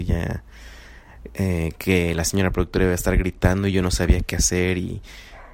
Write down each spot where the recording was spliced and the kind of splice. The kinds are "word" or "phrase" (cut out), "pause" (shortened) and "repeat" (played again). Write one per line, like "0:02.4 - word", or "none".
none